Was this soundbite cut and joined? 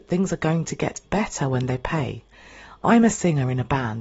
yes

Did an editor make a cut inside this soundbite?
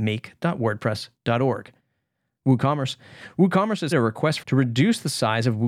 yes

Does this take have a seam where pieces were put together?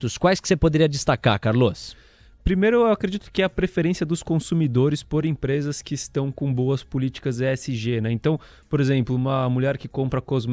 no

